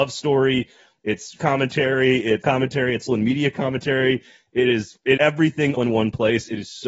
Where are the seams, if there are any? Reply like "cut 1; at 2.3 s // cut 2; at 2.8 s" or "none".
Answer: cut 1; at 1.4 s // cut 2; at 2.4 s // cut 3; at 3.1 s // cut 4; at 5.2 s // cut 5; at 5.8 s